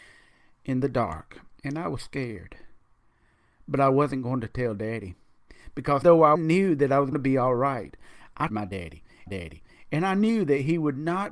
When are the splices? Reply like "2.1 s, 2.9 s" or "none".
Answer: 1.6 s, 6.0 s, 6.3 s, 7.1 s, 8.5 s, 9.3 s